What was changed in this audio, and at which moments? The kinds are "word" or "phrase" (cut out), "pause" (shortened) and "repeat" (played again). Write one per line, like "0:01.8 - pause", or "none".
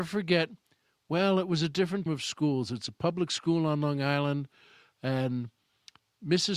0:02.1 - word

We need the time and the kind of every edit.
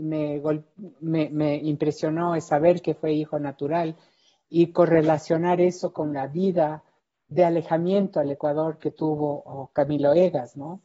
0:07.3 - word

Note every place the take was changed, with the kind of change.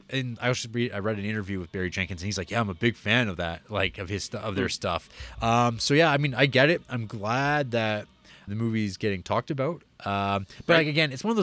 0:08.5 - word

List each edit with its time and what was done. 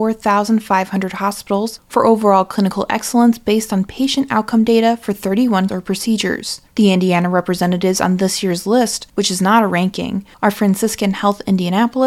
0:05.7 - word

